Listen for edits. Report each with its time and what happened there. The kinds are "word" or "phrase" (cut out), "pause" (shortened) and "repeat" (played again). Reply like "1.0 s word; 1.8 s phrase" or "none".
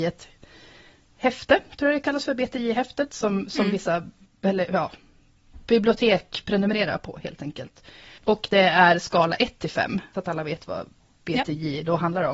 8.2 s pause; 10.1 s phrase